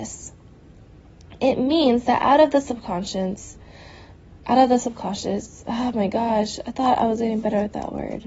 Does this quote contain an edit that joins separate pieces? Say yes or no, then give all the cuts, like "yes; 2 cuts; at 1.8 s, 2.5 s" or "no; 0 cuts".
no; 0 cuts